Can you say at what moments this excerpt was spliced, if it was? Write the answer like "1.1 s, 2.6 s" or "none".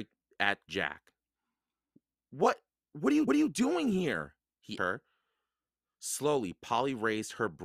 2.0 s, 3.3 s, 4.8 s